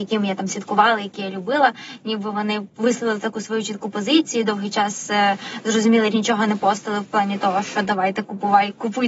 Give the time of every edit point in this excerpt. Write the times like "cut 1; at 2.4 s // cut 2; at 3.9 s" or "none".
cut 1; at 6.1 s